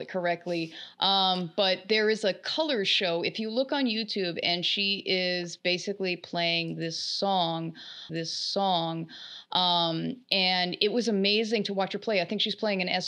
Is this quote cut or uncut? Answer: cut